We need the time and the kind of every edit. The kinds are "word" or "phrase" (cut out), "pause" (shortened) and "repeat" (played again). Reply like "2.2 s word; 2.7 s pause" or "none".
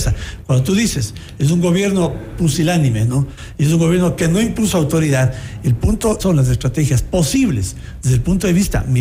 6.2 s phrase

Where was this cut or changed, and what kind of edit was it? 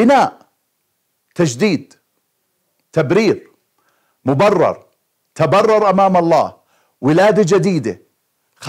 none

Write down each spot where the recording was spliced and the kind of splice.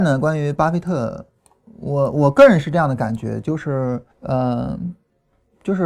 4.1 s pause

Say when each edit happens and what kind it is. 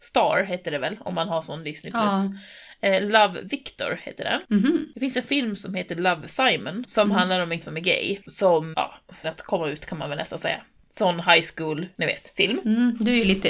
7.6 s word; 8.7 s word; 9.2 s phrase

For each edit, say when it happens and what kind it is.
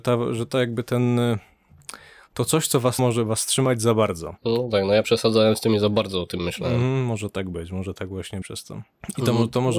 3.0 s word; 5.0 s word; 8.4 s word

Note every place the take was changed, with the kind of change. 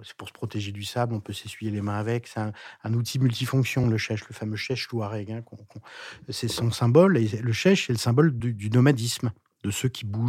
none

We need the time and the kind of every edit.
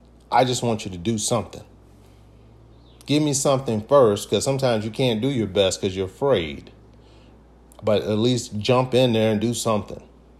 none

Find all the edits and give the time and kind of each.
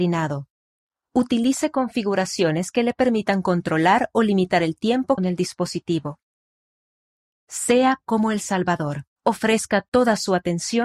5.2 s phrase; 9.2 s pause

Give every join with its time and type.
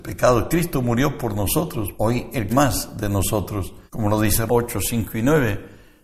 2.0 s word; 2.5 s word; 3.9 s pause; 4.5 s word

